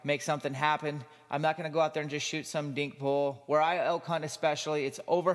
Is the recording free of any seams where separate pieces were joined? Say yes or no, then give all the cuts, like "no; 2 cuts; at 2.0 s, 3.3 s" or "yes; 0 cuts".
yes; 0 cuts